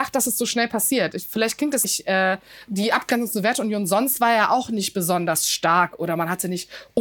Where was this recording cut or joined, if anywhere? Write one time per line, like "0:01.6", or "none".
0:01.8